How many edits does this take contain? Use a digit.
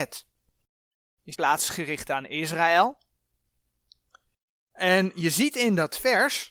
1